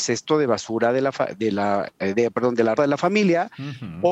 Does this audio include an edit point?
yes; 1 cut; at 2.8 s

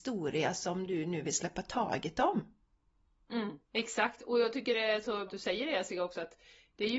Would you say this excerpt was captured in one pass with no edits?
no; 2 cuts; at 3.6 s, 5.3 s

